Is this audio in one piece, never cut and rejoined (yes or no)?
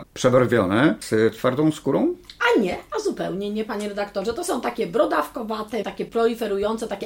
no